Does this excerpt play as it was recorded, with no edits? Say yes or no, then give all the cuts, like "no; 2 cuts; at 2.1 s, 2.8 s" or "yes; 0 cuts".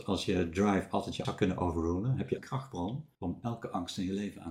no; 3 cuts; at 1.2 s, 2.4 s, 3.1 s